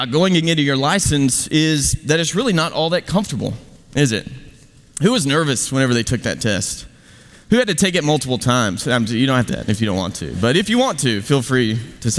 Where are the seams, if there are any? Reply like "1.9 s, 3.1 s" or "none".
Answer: 9.5 s